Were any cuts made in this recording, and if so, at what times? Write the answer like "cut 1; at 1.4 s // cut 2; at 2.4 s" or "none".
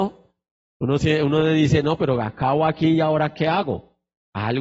none

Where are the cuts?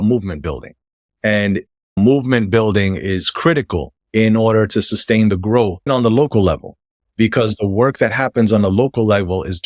cut 1; at 4.0 s // cut 2; at 5.9 s

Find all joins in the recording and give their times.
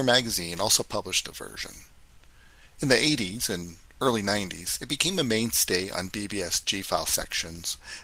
none

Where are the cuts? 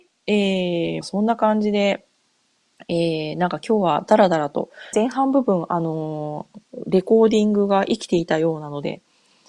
cut 1; at 1.0 s // cut 2; at 4.9 s // cut 3; at 6.7 s

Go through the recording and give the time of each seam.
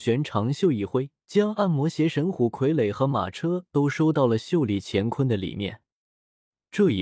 cut 1; at 1.2 s

